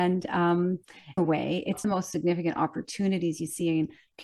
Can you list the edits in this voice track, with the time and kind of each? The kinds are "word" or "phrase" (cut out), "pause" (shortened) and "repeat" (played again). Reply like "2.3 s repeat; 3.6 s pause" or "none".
1.2 s word; 1.8 s phrase